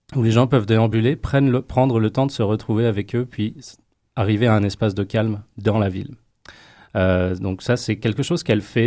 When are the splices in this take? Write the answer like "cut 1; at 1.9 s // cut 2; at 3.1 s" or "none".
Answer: none